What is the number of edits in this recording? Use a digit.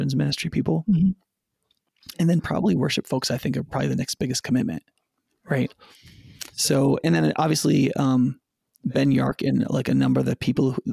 0